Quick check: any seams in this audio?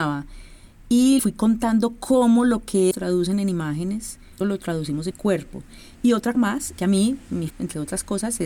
yes; 7 cuts; at 1.2 s, 2.9 s, 4.4 s, 5.1 s, 6.3 s, 6.8 s, 7.5 s

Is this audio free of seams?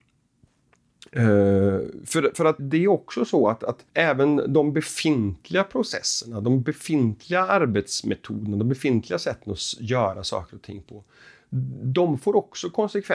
no; 2 cuts; at 2.6 s, 3.9 s

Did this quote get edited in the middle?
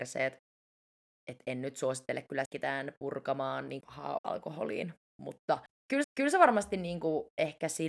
yes; 4 cuts; at 2.4 s, 3.8 s, 4.2 s, 6.0 s

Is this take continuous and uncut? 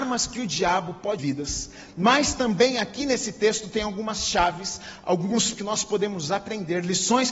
no; 2 cuts; at 1.2 s, 5.5 s

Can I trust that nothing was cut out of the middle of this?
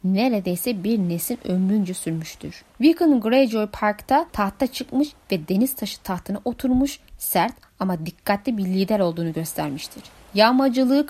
no; 3 cuts; at 2.7 s, 4.3 s, 10.2 s

